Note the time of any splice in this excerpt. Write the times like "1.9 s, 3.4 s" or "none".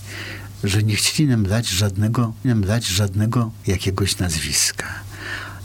2.4 s